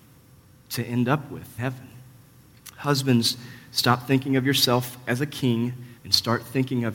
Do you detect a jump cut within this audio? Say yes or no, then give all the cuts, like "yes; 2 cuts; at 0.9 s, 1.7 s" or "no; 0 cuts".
yes; 2 cuts; at 1.6 s, 6.0 s